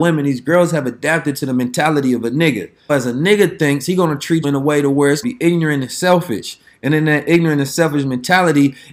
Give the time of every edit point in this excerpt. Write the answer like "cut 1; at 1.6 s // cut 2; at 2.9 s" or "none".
cut 1; at 2.9 s // cut 2; at 4.4 s // cut 3; at 5.2 s